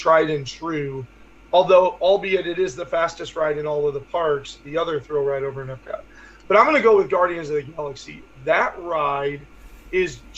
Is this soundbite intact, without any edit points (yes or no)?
yes